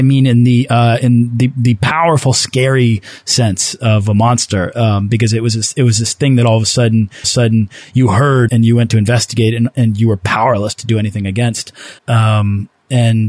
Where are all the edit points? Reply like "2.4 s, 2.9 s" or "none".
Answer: 7.2 s, 8.5 s, 12.0 s